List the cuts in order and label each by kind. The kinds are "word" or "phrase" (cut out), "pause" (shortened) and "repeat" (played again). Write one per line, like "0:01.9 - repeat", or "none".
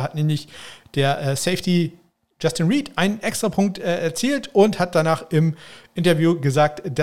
none